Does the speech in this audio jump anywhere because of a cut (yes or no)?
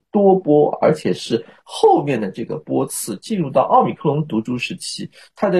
no